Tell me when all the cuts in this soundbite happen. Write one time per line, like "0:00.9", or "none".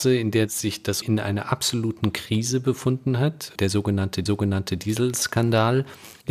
0:01.0
0:04.3